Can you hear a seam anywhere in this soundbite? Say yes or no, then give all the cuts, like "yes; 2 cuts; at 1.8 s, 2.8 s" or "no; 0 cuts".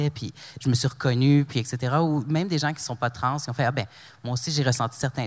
no; 0 cuts